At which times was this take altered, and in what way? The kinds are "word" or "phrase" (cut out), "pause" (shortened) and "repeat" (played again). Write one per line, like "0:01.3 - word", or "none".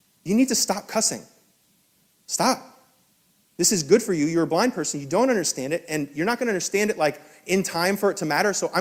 none